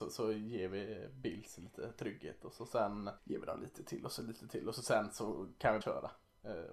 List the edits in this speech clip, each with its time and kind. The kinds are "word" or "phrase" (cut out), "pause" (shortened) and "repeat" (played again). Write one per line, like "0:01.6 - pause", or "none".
0:03.2 - pause
0:05.8 - word